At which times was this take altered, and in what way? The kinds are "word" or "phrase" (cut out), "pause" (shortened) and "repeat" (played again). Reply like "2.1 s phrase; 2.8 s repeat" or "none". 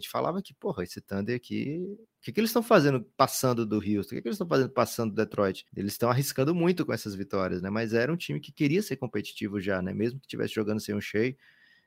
5.7 s pause